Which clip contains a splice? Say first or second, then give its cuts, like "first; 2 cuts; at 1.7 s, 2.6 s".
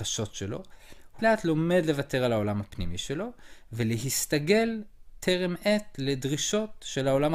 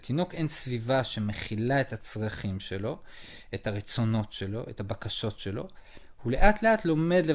first; 1 cut; at 1.2 s